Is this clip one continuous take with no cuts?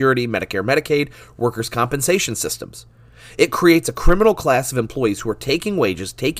yes; 0 cuts

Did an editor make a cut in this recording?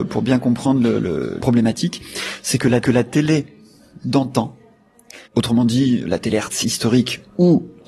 yes; 5 cuts; at 1.4 s, 2.8 s, 5.3 s, 6.1 s, 6.6 s

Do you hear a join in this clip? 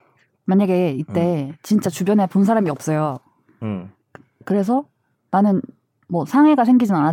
no; 0 cuts

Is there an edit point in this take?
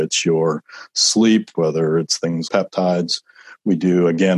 yes; 2 cuts; at 1.5 s, 2.5 s

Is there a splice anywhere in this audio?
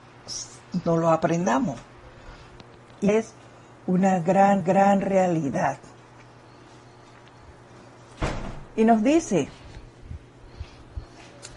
yes; 2 cuts; at 3.1 s, 4.6 s

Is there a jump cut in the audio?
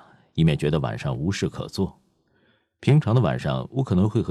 no; 0 cuts

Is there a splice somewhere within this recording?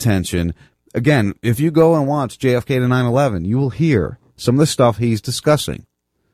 no; 0 cuts

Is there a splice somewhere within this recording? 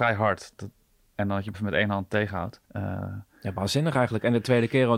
yes; 2 cuts; at 1.5 s, 2.6 s

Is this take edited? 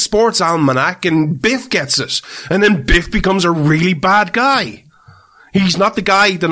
no; 0 cuts

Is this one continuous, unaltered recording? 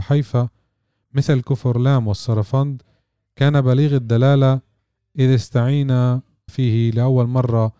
no; 1 cut; at 6.5 s

